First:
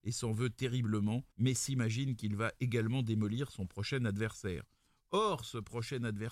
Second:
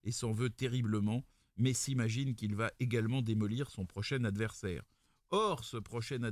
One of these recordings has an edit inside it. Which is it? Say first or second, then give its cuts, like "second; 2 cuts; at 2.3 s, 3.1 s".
first; 1 cut; at 1.3 s